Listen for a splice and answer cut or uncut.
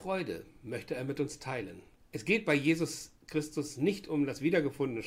cut